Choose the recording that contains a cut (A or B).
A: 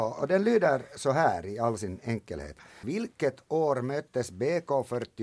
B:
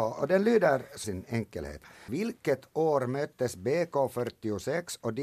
B